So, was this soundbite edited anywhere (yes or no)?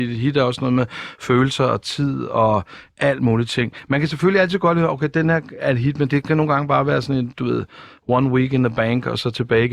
no